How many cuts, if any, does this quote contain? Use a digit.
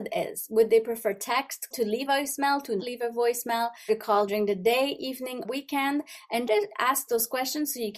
7